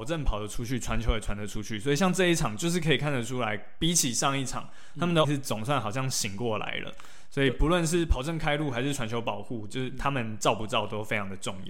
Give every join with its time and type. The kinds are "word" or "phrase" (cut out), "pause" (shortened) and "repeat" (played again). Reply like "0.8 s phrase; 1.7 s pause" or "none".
5.2 s word